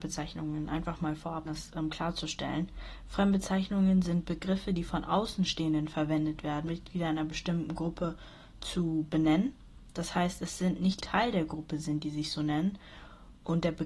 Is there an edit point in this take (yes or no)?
yes